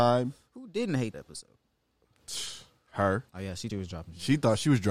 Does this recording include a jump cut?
yes; 3 cuts; at 1.1 s, 3.3 s, 3.7 s

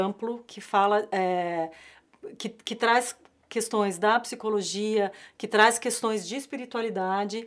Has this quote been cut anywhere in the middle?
no; 0 cuts

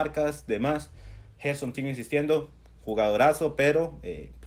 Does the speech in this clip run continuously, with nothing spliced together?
no; 1 cut; at 1.7 s

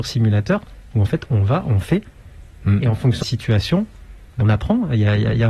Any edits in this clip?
yes; 2 cuts; at 3.2 s, 4.4 s

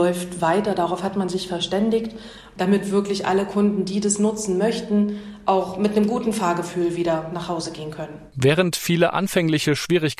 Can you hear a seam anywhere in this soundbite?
no; 0 cuts

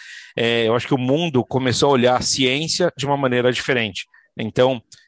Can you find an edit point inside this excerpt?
no; 0 cuts

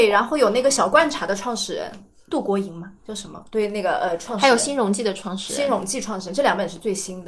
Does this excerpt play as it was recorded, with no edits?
yes; 0 cuts

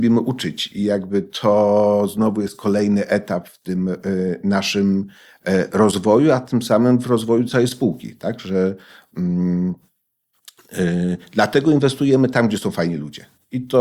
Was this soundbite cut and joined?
no; 0 cuts

